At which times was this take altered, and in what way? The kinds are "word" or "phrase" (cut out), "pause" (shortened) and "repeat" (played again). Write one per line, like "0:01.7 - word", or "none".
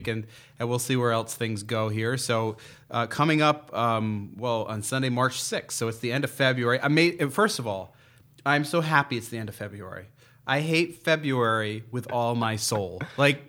none